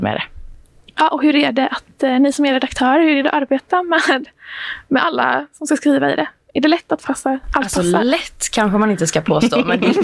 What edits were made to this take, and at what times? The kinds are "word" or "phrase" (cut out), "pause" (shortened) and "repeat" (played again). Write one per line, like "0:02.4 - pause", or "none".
0:07.0 - phrase